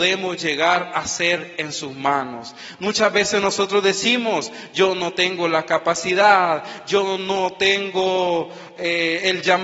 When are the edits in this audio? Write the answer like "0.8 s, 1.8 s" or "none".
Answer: none